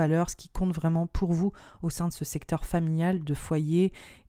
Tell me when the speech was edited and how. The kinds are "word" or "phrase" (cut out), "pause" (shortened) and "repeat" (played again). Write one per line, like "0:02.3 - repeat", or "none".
none